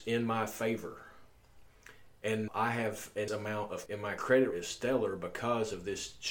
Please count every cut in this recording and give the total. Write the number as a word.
four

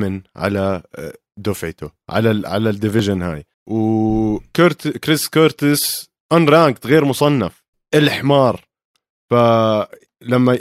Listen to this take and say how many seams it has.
two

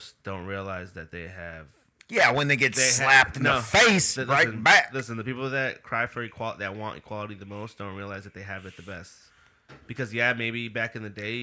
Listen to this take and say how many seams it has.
zero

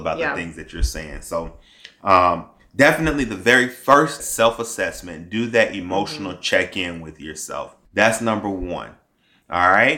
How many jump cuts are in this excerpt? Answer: two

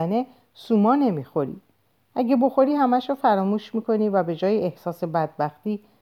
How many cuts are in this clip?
zero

